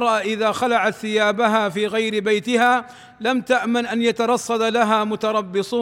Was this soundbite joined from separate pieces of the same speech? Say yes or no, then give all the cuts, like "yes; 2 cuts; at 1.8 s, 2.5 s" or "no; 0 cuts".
no; 0 cuts